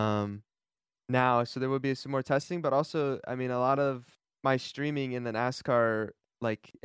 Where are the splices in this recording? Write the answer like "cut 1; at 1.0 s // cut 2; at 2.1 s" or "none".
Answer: cut 1; at 4.2 s